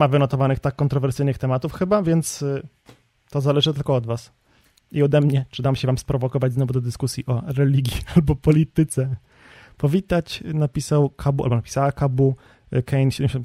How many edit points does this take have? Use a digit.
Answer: 0